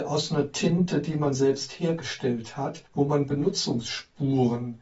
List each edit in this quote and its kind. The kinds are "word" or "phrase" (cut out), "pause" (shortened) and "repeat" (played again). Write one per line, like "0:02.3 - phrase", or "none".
0:02.9 - pause